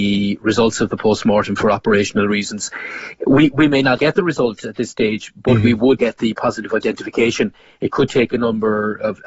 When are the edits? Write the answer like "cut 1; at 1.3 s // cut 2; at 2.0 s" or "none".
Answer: cut 1; at 4.0 s // cut 2; at 6.0 s